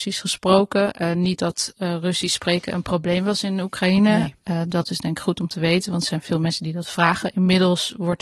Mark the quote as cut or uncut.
uncut